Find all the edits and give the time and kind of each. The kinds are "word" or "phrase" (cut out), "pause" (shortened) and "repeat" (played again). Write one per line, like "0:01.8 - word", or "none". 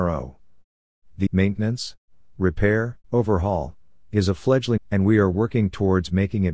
0:01.3 - word
0:03.0 - pause
0:04.8 - word